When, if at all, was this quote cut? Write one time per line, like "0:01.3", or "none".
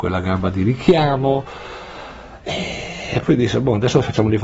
none